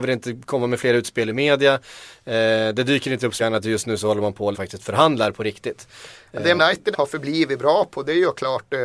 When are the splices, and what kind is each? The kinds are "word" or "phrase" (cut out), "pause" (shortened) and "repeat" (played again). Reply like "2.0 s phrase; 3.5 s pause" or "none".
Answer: 3.4 s word; 4.5 s word; 6.6 s word; 6.9 s word

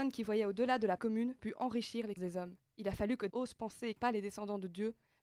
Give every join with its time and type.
1.0 s word; 1.4 s phrase; 2.2 s word; 2.6 s pause; 3.3 s word; 4.0 s phrase

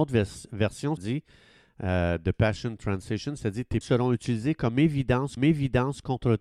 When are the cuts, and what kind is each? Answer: 1.0 s word; 3.8 s word; 5.4 s repeat

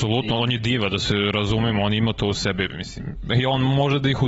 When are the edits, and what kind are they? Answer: none

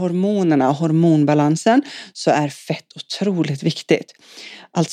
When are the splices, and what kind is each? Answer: none

